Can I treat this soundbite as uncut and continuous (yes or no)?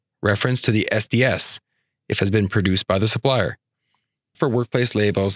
no